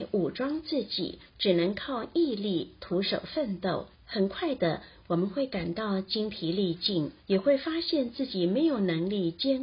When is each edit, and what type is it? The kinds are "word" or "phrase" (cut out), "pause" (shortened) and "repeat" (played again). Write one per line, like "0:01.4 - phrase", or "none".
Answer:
0:01.3 - pause
0:03.9 - pause
0:07.2 - pause